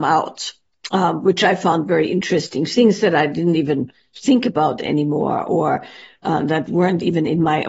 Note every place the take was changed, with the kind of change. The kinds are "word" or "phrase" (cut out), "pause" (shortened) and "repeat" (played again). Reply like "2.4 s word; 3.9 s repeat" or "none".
none